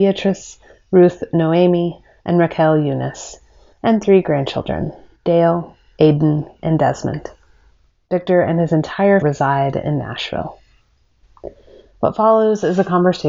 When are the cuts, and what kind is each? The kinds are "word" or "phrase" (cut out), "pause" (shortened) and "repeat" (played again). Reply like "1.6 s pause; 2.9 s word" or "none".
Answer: 9.2 s word